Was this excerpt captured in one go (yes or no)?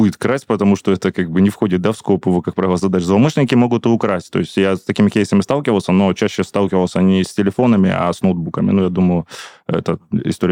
yes